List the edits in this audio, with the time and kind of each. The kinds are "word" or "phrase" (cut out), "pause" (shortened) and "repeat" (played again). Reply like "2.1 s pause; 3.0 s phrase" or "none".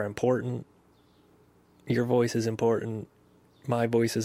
none